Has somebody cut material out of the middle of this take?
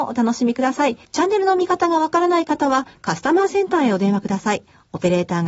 yes; 1 cut; at 1.0 s

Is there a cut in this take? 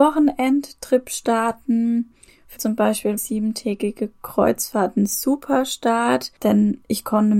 yes; 2 cuts; at 2.6 s, 3.2 s

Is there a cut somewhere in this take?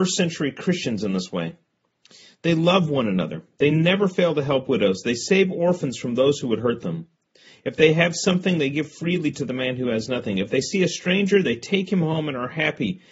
no; 0 cuts

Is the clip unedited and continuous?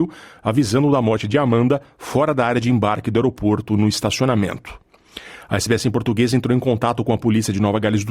yes; 0 cuts

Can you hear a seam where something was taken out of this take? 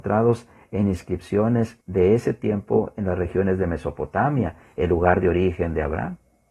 yes; 1 cut; at 1.8 s

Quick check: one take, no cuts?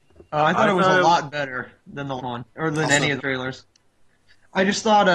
no; 3 cuts; at 2.2 s, 2.5 s, 3.2 s

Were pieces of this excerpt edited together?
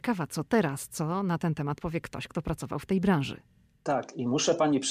no; 0 cuts

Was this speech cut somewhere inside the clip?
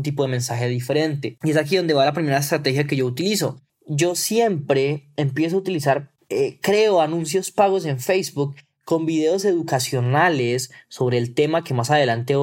no; 0 cuts

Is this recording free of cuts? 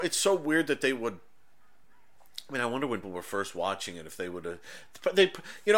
no; 1 cut; at 3.0 s

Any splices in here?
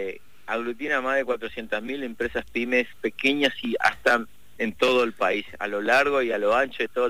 yes; 2 cuts; at 2.9 s, 4.6 s

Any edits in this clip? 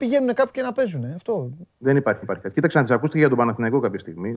yes; 2 cuts; at 1.7 s, 2.2 s

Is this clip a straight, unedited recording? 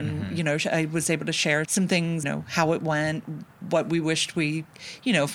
no; 2 cuts; at 1.6 s, 2.2 s

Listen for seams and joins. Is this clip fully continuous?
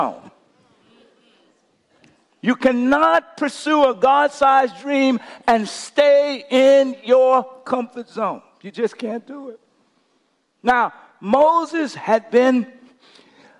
yes; 0 cuts

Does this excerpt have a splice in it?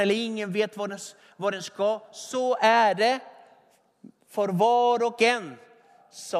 no; 0 cuts

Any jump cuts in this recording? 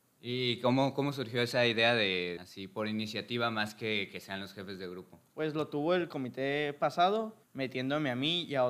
yes; 3 cuts; at 2.4 s, 5.3 s, 7.4 s

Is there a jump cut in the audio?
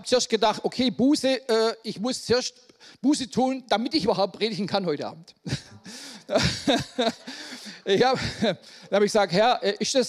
no; 0 cuts

